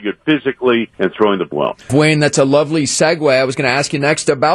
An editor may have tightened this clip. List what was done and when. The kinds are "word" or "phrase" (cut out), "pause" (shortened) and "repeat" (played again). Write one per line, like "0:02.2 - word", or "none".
0:00.9 - pause
0:01.5 - phrase
0:01.8 - pause